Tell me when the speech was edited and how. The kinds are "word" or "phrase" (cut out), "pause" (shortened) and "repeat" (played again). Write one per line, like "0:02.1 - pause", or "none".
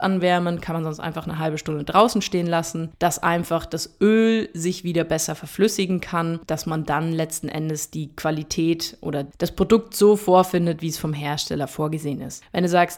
none